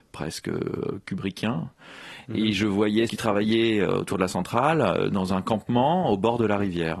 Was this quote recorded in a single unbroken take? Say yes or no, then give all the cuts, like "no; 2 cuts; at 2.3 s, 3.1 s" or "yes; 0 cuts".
no; 1 cut; at 3.1 s